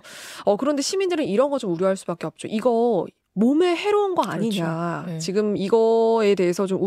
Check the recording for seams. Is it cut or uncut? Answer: uncut